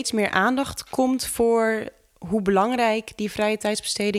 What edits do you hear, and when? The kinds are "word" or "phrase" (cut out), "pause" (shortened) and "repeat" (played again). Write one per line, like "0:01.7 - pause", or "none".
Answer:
none